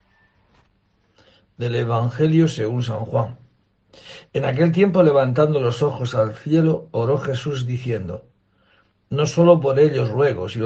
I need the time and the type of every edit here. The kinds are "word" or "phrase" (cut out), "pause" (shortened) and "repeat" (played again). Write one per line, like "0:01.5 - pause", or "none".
none